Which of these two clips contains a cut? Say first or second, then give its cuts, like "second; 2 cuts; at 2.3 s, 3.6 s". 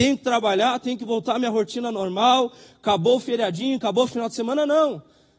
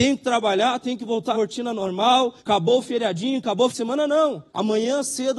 second; 4 cuts; at 1.3 s, 2.4 s, 3.7 s, 4.5 s